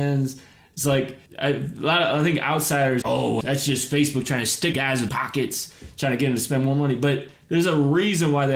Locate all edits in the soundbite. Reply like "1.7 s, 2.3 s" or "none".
1.3 s, 3.0 s, 3.4 s, 4.7 s, 5.1 s